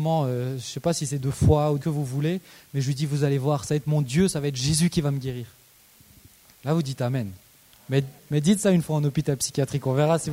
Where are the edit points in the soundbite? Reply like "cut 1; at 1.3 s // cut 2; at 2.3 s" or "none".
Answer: cut 1; at 1.8 s // cut 2; at 8.2 s